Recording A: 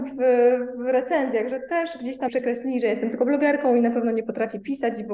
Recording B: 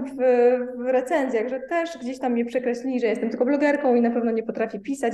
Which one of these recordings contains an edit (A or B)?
A